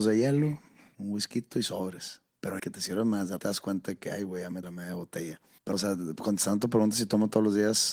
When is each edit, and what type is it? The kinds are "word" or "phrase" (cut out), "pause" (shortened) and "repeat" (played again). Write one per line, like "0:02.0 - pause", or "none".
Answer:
0:02.6 - word
0:03.4 - word
0:04.6 - word
0:05.7 - word